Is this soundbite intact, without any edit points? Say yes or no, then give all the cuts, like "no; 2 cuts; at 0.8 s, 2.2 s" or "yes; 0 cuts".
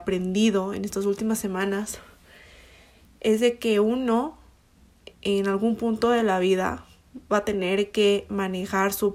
yes; 0 cuts